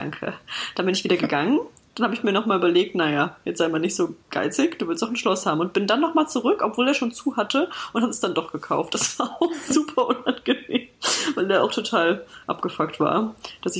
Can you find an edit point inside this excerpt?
no; 0 cuts

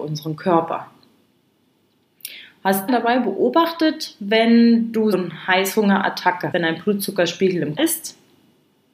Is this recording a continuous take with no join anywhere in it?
no; 4 cuts; at 2.9 s, 5.1 s, 6.5 s, 7.8 s

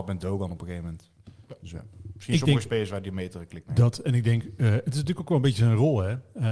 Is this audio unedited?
yes; 0 cuts

